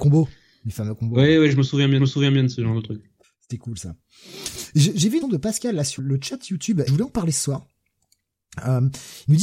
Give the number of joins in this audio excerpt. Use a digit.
5